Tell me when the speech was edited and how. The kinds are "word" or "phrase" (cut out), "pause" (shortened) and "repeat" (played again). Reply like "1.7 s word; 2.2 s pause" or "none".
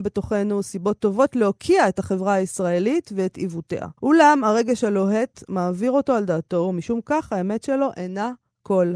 4.0 s pause